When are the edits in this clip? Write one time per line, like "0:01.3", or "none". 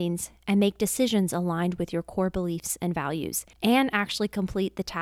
0:03.5